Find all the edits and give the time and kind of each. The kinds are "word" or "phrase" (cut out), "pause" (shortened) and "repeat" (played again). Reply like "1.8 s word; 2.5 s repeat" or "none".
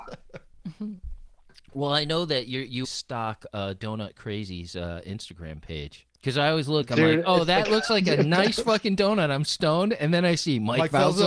2.8 s word; 6.1 s pause

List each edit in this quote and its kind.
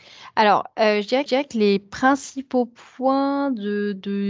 1.3 s repeat

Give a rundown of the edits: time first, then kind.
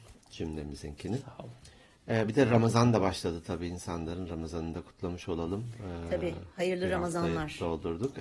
none

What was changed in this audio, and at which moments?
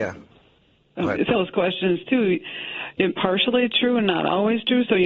1.3 s word; 3.1 s phrase

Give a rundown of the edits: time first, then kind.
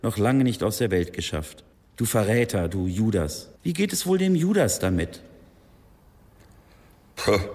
1.7 s pause; 3.6 s pause

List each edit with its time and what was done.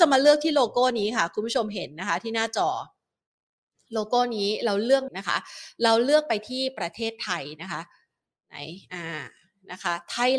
5.1 s word

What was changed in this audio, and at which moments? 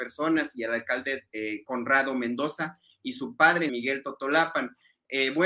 3.7 s phrase

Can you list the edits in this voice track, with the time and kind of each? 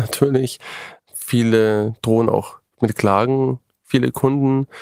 none

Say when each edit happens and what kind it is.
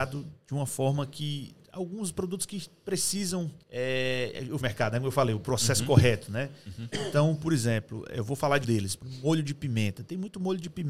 3.6 s pause; 4.6 s phrase; 8.6 s word

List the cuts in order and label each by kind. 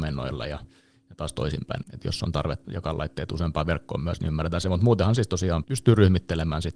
1.8 s word; 2.6 s word; 5.6 s word

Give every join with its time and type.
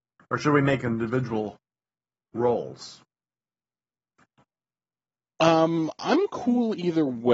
none

